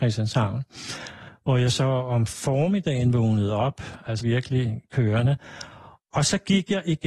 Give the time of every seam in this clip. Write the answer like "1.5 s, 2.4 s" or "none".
4.2 s